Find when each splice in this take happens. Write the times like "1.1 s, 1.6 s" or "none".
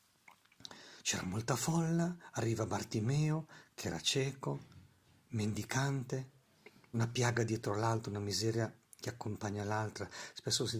6.9 s